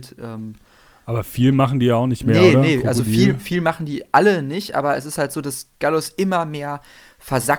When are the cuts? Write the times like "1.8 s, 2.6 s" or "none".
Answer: none